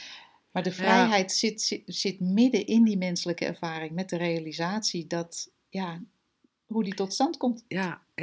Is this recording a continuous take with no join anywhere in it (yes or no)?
yes